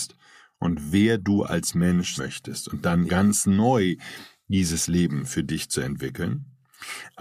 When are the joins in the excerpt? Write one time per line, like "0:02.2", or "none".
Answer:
0:02.2
0:03.1